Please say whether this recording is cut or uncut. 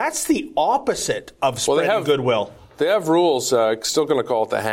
uncut